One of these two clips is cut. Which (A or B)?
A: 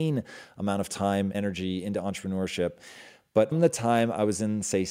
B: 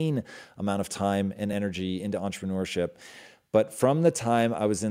A